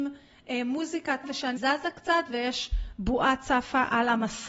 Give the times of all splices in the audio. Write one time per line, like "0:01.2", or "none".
0:01.2
0:01.6